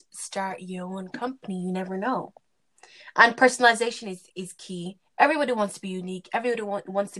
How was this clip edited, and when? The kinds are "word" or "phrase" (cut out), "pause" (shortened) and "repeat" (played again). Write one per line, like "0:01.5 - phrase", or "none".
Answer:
0:04.3 - pause